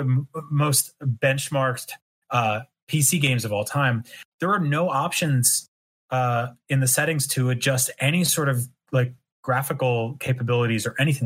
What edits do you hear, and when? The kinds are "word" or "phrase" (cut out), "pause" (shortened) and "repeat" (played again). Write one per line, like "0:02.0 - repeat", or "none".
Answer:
none